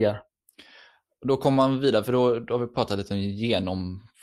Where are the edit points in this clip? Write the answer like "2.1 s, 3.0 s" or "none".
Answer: none